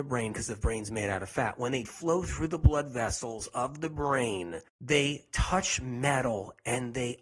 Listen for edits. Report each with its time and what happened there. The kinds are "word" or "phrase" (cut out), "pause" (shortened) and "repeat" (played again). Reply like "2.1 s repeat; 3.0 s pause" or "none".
1.9 s word; 4.7 s pause